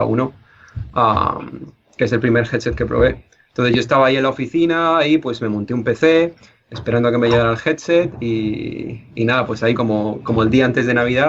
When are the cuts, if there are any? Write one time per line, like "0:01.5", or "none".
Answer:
none